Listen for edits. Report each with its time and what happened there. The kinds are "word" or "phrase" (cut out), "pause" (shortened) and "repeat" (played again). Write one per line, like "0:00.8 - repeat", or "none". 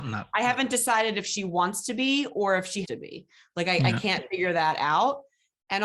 0:02.8 - word

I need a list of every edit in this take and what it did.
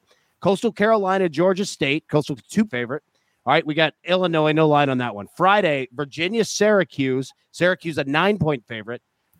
0:02.4 - word
0:02.7 - word
0:04.0 - word

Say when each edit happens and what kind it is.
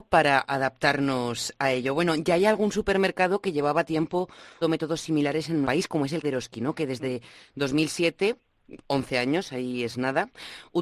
0:04.6 - word
0:05.6 - word
0:06.2 - word

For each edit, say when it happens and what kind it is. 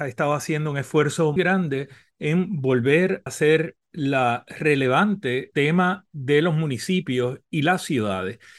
0:01.4 - word
0:03.3 - word
0:05.5 - word

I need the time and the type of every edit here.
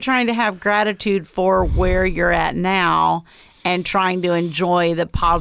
none

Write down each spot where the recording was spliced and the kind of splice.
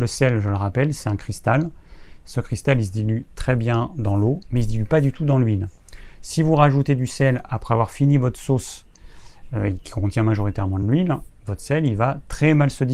none

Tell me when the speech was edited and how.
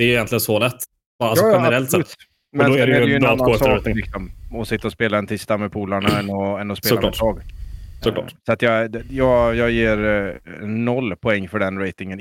none

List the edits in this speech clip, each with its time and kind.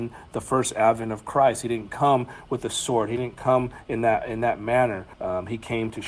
0:05.1 - pause

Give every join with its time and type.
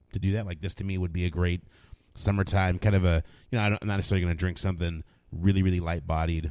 none

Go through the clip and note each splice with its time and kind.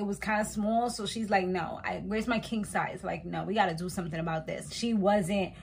0:04.7 - word

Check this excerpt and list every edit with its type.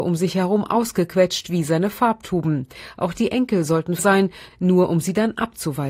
0:04.0 - word

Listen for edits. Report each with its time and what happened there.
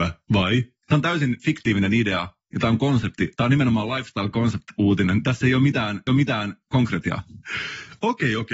0:06.1 - repeat

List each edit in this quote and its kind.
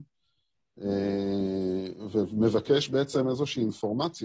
none

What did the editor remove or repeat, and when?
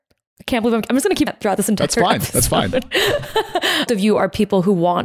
0:01.3 - word
0:03.9 - word

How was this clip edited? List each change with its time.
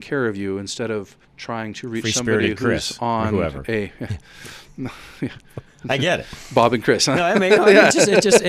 0:01.2 - pause

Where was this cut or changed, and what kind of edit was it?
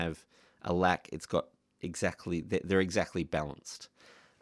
none

